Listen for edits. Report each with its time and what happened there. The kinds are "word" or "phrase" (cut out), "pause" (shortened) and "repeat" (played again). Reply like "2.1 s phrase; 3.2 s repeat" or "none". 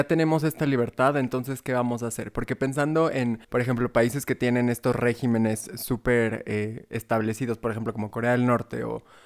3.4 s pause